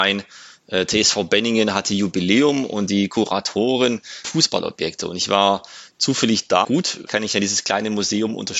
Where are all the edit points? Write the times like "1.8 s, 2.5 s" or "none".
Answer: 4.2 s, 6.6 s, 7.1 s

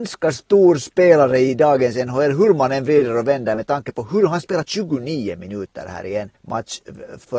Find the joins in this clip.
6.4 s

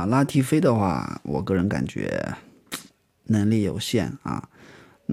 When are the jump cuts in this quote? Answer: none

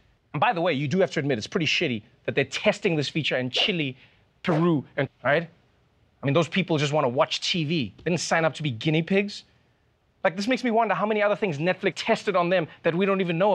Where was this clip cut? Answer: 5.1 s, 11.9 s

